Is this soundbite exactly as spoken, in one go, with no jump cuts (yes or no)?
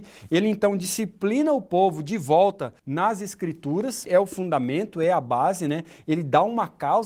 no